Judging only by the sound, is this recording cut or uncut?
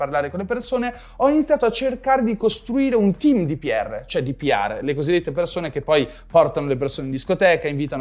uncut